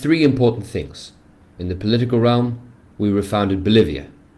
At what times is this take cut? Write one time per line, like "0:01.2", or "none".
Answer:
none

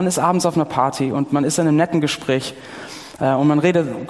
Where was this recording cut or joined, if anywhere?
none

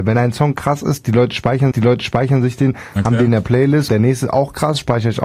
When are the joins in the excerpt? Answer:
0:01.7
0:03.9

